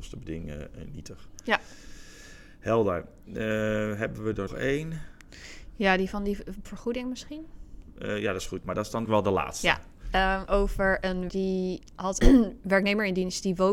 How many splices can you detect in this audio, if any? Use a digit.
6